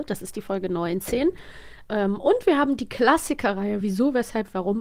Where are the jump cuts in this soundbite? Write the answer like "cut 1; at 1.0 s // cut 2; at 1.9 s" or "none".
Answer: none